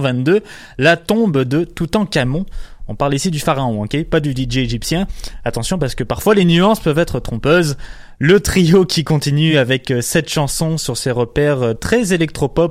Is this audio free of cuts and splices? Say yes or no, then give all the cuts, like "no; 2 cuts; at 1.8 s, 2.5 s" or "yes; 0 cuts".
yes; 0 cuts